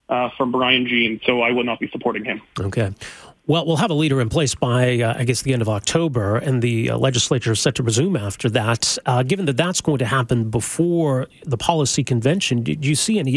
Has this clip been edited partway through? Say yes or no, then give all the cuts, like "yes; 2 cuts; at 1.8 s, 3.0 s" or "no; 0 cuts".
no; 0 cuts